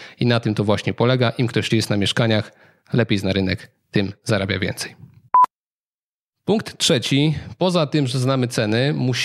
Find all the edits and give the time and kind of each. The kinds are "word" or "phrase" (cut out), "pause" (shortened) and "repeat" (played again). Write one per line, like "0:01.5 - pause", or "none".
0:01.7 - word

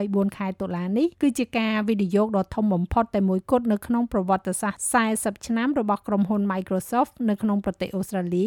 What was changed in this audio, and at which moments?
0:01.1 - pause

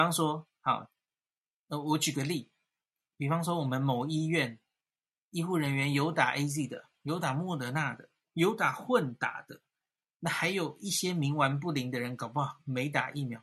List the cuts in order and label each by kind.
none

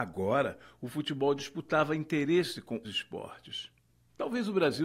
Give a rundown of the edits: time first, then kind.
0:02.8 - word
0:03.9 - pause

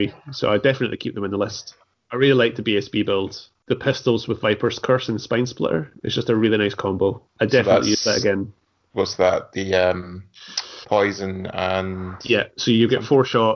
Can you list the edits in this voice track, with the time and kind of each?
0:07.3 - pause

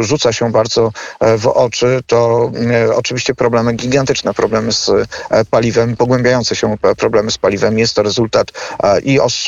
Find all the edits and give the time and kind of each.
none

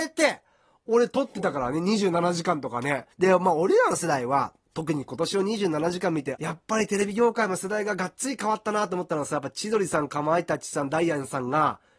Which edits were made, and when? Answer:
0:03.1 - pause
0:04.6 - pause
0:06.3 - word

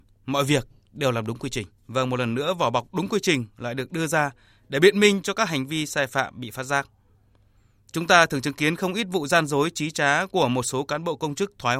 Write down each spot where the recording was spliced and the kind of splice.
0:01.8 - pause

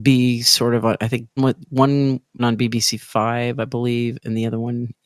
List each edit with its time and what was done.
0:01.4 - word
0:02.4 - word

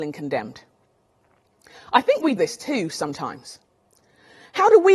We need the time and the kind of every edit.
0:02.4 - word

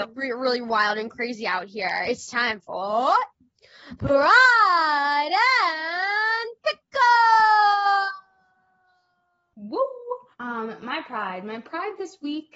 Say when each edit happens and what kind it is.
0:10.3 - pause

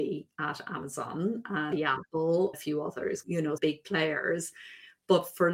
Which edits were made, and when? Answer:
0:01.7 - word
0:02.5 - word
0:03.2 - word
0:03.6 - phrase

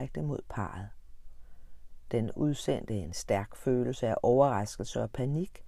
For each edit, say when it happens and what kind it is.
none

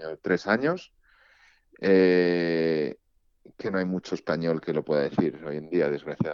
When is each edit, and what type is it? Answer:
none

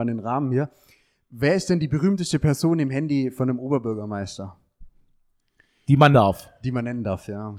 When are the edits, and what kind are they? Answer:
0:06.1 - word

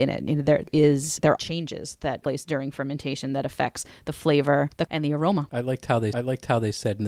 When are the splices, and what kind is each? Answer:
0:01.4 - word
0:02.2 - word
0:04.9 - word
0:06.1 - repeat

